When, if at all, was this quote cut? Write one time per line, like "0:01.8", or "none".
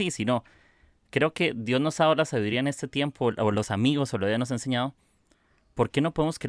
none